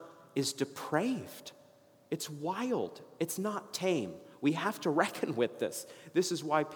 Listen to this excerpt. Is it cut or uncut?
uncut